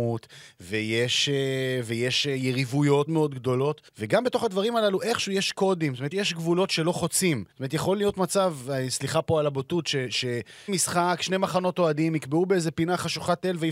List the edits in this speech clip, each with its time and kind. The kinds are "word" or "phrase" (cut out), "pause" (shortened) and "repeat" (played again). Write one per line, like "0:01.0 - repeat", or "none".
0:03.1 - word
0:03.9 - pause
0:06.1 - word
0:07.5 - pause
0:10.7 - word